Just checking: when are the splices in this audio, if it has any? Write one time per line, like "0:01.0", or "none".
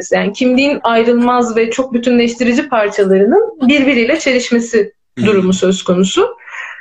none